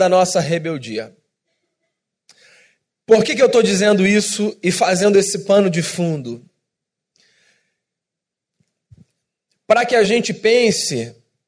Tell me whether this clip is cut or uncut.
uncut